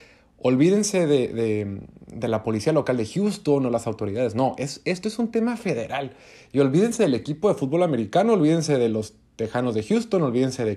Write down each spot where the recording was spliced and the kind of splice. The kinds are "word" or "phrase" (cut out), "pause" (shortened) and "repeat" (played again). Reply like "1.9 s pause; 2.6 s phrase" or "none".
none